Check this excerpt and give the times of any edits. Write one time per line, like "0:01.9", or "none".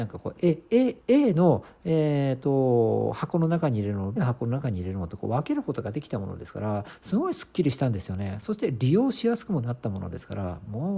0:01.0
0:04.2